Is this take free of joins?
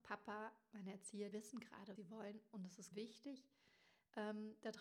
no; 3 cuts; at 1.3 s, 2.0 s, 2.9 s

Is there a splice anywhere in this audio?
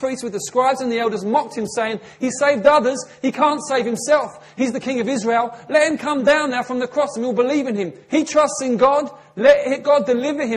no; 0 cuts

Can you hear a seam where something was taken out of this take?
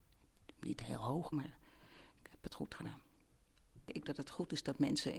yes; 2 cuts; at 1.3 s, 4.0 s

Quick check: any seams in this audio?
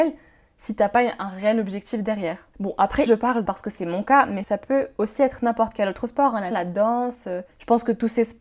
yes; 4 cuts; at 3.1 s, 3.4 s, 6.5 s, 7.5 s

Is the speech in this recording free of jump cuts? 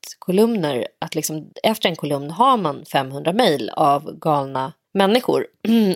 no; 2 cuts; at 1.5 s, 4.8 s

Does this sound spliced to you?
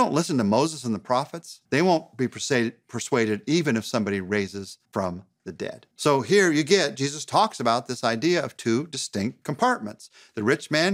yes; 4 cuts; at 1.6 s, 4.8 s, 5.9 s, 9.4 s

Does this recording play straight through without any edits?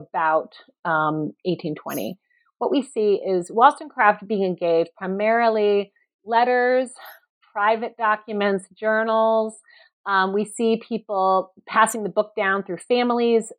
yes; 0 cuts

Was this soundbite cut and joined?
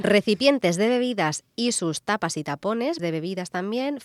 yes; 2 cuts; at 1.5 s, 3.0 s

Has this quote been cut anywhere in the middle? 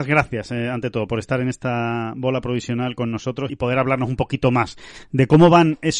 yes; 1 cut; at 3.5 s

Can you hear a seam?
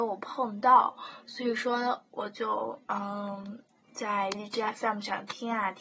no; 0 cuts

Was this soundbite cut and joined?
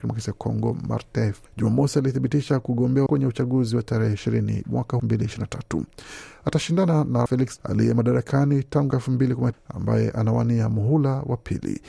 yes; 8 cuts; at 1.5 s, 3.1 s, 4.6 s, 5.0 s, 7.3 s, 7.6 s, 8.9 s, 9.5 s

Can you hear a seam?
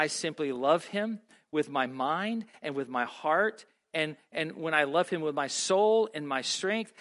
no; 0 cuts

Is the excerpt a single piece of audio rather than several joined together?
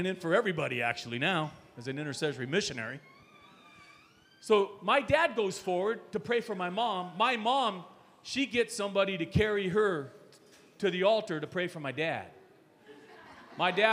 yes; 0 cuts

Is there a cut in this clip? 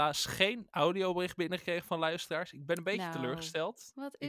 no; 0 cuts

